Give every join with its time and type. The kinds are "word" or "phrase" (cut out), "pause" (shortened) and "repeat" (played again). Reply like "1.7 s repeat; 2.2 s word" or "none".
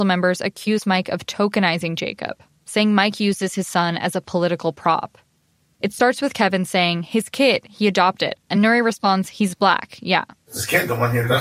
none